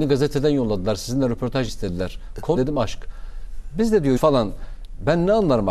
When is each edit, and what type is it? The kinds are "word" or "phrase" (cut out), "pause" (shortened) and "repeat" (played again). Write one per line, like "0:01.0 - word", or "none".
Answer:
0:01.7 - word
0:02.6 - word
0:04.2 - word

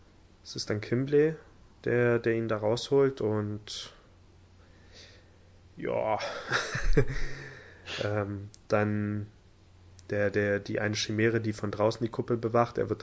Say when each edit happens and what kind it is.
none

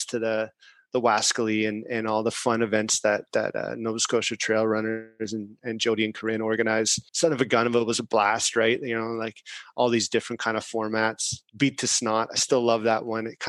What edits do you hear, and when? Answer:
0:07.1 - pause
0:11.5 - pause

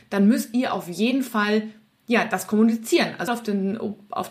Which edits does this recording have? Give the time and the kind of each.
0:03.3 - word

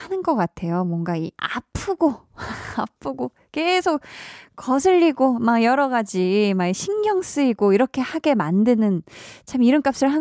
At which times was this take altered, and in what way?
0:01.3 - pause

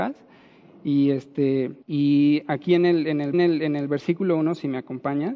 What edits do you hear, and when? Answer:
0:01.8 - pause
0:03.3 - repeat

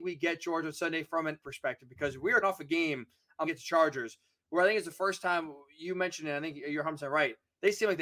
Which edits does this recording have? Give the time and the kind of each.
0:01.4 - word
0:02.4 - word
0:03.5 - word

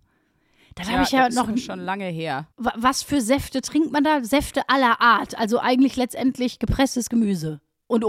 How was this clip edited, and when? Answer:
0:02.5 - pause

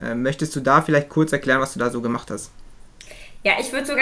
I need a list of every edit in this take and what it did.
none

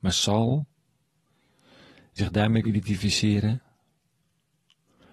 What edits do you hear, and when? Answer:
0:02.2 - word
0:02.6 - word

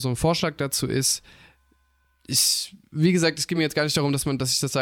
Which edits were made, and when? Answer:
none

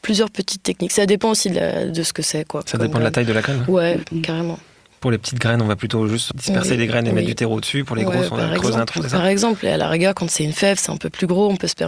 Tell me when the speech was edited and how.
none

